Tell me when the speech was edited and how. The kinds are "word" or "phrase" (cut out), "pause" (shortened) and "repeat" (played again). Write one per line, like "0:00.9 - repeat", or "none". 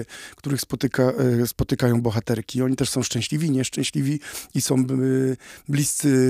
none

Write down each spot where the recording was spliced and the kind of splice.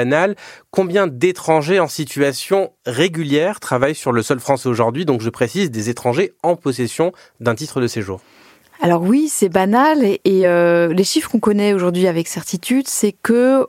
none

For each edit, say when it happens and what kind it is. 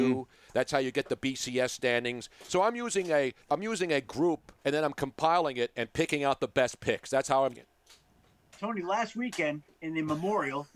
0:03.4 - pause
0:04.6 - pause
0:07.6 - word
0:09.7 - pause

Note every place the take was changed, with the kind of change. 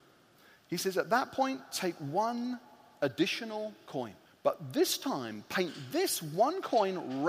0:04.3 - pause

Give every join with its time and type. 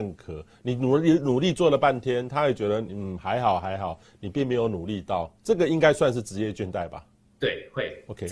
0:05.4 - pause
0:07.3 - pause

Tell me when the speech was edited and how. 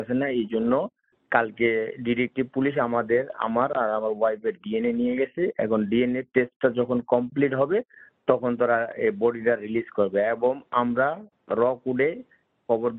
none

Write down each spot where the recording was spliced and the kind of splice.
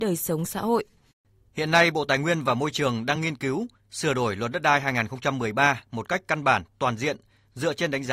none

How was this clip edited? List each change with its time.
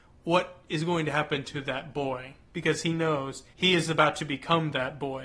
0:02.4 - pause
0:03.5 - pause

